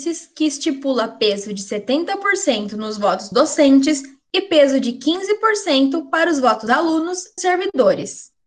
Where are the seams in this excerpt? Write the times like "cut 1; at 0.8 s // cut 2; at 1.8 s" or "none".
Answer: cut 1; at 3.3 s // cut 2; at 6.7 s // cut 3; at 7.4 s